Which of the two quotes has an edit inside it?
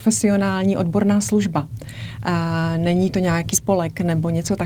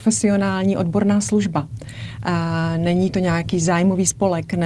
first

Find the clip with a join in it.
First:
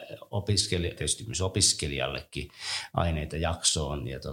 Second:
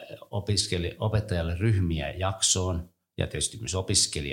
first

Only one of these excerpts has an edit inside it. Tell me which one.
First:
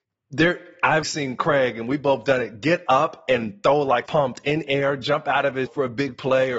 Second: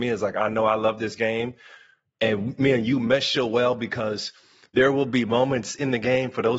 first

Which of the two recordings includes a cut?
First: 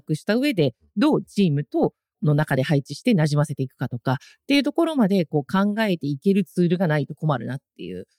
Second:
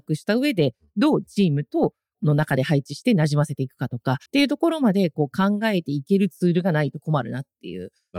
second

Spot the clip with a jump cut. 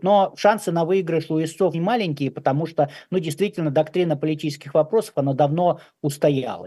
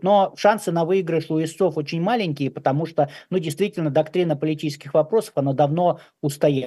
first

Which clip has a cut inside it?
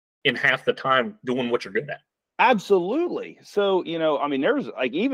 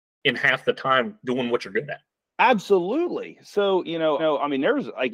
second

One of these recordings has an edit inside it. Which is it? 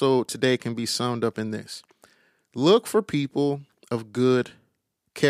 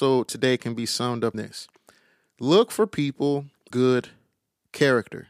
second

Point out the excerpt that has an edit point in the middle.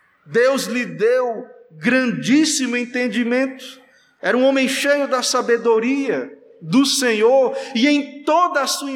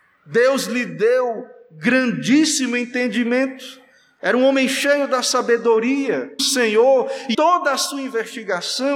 second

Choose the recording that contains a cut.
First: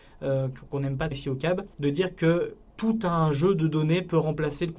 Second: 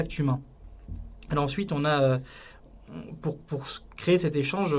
first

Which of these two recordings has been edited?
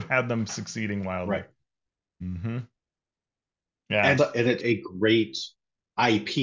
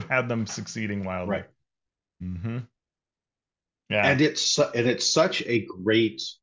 first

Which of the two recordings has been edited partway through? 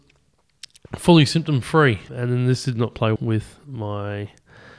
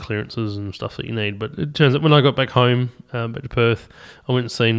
first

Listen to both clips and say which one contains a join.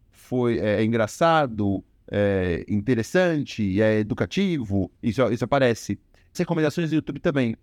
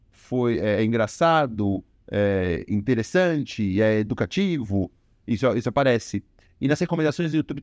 first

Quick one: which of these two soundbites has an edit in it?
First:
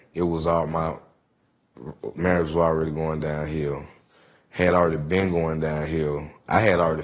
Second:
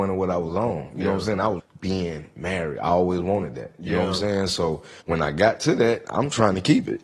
second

